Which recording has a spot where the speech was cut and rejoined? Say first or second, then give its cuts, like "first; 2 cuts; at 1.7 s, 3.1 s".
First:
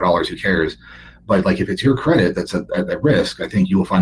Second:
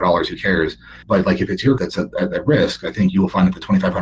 second; 2 cuts; at 1.0 s, 1.8 s